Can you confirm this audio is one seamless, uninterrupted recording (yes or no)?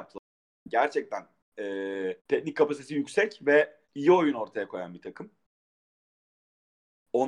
no